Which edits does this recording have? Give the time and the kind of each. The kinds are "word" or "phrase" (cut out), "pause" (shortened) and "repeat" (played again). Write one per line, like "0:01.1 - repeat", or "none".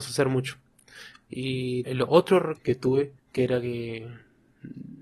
0:01.8 - word
0:02.6 - word
0:03.2 - pause